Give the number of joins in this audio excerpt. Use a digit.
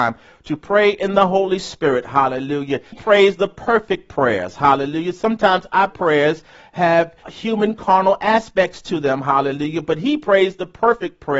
2